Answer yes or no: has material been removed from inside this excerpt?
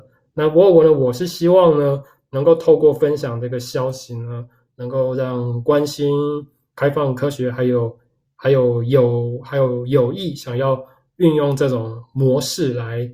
no